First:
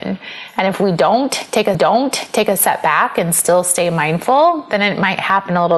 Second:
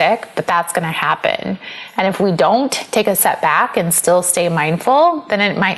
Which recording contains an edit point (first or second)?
first